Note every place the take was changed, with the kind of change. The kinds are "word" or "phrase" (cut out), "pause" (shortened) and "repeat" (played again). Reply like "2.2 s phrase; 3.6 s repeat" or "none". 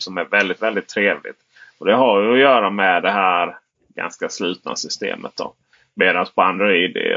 none